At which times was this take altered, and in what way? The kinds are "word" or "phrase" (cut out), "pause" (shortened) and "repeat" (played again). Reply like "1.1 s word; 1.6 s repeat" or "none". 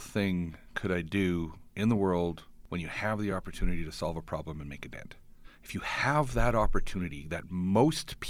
none